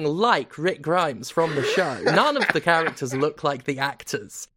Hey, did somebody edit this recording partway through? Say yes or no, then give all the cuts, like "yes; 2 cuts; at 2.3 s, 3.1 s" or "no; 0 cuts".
no; 0 cuts